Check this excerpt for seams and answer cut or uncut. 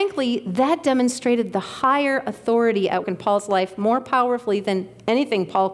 cut